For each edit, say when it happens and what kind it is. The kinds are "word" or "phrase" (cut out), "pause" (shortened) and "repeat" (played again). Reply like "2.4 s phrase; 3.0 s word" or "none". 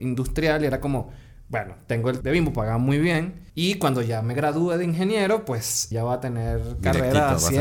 2.2 s word; 3.5 s pause; 5.9 s word